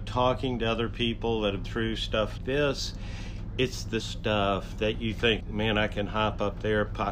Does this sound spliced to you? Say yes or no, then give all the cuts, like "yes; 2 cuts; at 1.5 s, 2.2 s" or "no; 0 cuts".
yes; 4 cuts; at 1.6 s, 2.4 s, 4.0 s, 5.4 s